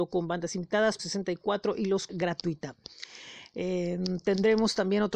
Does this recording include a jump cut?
yes; 2 cuts; at 1.0 s, 2.1 s

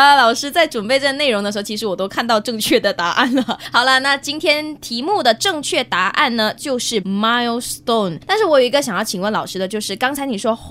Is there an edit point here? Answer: yes; 1 cut; at 7.0 s

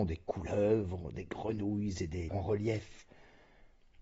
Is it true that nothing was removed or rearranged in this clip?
no; 1 cut; at 2.3 s

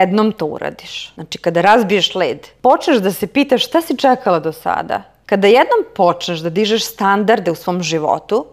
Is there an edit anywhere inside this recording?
no; 0 cuts

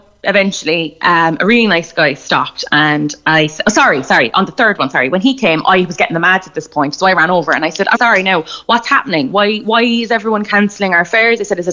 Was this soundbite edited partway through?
yes; 1 cut; at 7.9 s

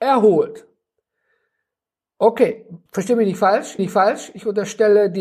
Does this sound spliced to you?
yes; 2 cuts; at 2.9 s, 3.8 s

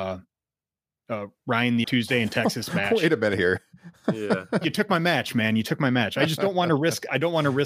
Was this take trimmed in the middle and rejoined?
yes; 2 cuts; at 1.8 s, 4.6 s

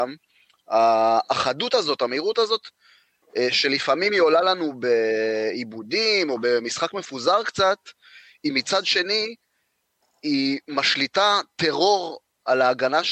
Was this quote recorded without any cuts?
yes; 0 cuts

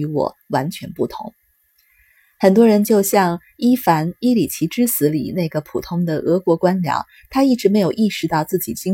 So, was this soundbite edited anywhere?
no; 0 cuts

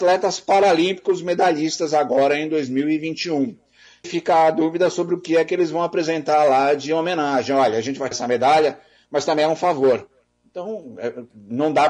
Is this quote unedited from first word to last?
no; 2 cuts; at 4.0 s, 8.1 s

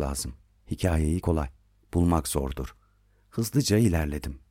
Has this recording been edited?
yes; 1 cut; at 1.2 s

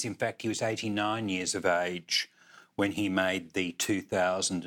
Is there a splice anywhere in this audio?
no; 0 cuts

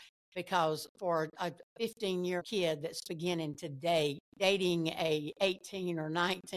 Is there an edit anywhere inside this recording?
yes; 3 cuts; at 2.4 s, 3.0 s, 4.3 s

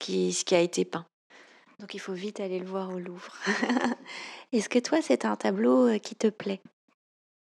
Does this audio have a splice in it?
no; 0 cuts

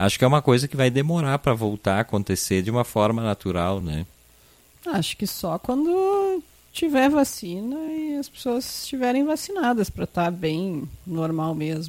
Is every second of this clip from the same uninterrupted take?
yes; 0 cuts

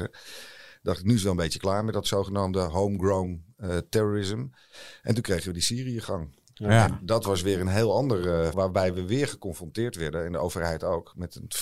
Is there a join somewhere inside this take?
yes; 1 cut; at 8.5 s

